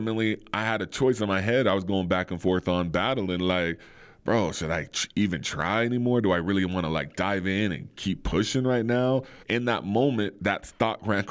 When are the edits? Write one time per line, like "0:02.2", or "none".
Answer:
0:09.4